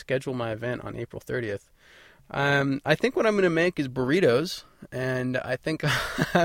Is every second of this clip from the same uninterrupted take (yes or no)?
yes